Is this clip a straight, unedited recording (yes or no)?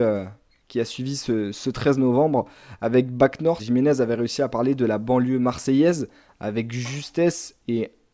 no